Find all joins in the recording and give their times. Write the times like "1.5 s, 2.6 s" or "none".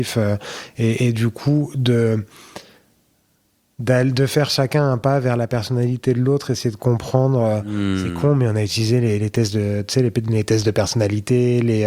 none

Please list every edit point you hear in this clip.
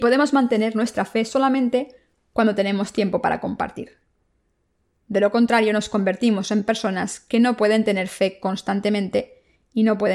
none

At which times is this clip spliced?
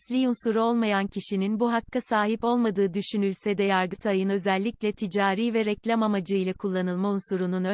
none

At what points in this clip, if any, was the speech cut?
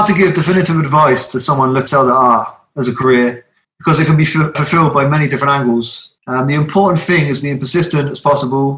1.9 s, 3.6 s, 4.5 s, 6.2 s

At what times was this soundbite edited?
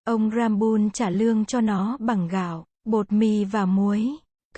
2.7 s

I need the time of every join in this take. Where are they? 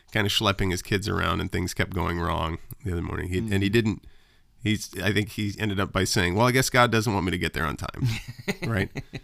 none

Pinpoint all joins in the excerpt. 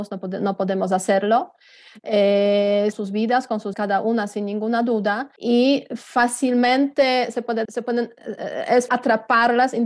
2.9 s, 3.7 s, 5.4 s, 7.6 s, 8.9 s

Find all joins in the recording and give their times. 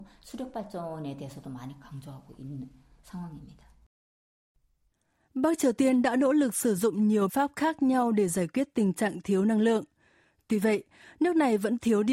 7.3 s

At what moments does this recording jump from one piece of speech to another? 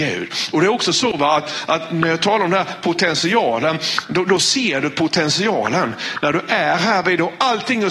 none

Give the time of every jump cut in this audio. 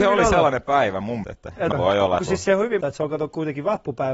1.2 s, 1.7 s, 2.2 s, 2.8 s

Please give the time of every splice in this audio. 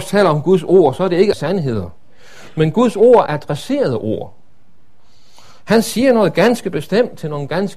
1.3 s, 3.3 s

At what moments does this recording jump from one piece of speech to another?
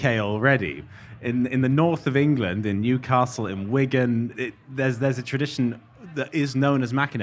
4.3 s

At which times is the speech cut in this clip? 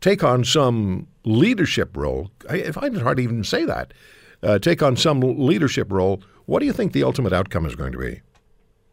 none

